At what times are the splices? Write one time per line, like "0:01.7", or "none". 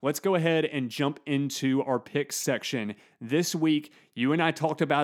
none